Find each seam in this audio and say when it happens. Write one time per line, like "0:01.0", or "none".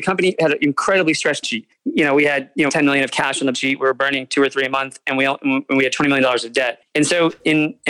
0:01.4
0:02.7
0:03.5